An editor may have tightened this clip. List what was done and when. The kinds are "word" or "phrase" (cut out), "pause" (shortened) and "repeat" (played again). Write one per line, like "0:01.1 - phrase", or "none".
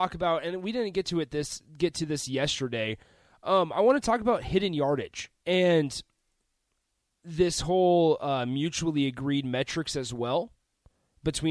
0:05.4 - pause

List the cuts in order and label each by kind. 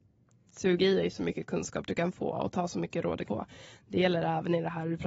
0:03.2 - word

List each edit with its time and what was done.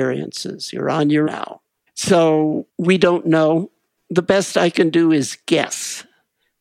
0:01.2 - word

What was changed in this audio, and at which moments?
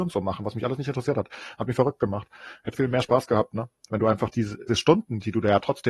0:02.7 - word
0:04.7 - word

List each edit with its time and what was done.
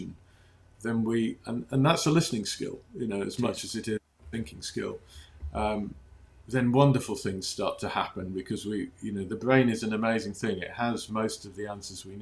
none

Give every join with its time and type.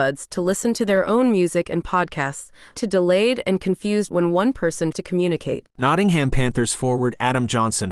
0:02.8 - word
0:04.1 - word
0:04.9 - word

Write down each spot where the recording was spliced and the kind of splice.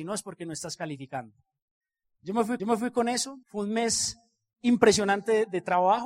0:02.6 - repeat
0:03.4 - pause

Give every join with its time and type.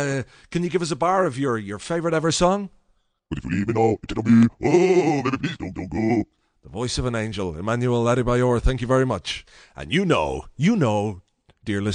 0:04.1 - phrase
0:05.7 - repeat

